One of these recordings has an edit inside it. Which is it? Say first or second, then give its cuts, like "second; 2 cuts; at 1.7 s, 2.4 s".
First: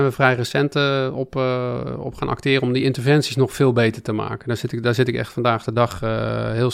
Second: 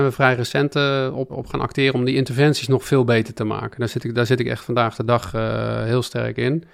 second; 1 cut; at 1.3 s